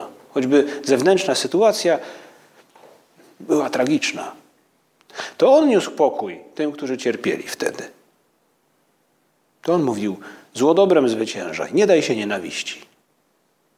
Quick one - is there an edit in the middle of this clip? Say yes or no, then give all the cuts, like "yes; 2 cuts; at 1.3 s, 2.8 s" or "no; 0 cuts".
no; 0 cuts